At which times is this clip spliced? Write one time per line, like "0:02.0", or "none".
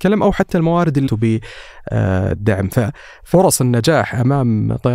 0:01.1